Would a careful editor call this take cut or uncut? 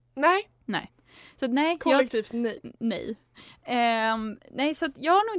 cut